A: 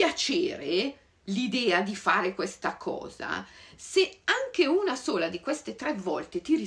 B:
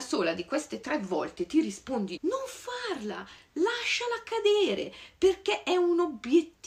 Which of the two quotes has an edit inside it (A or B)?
B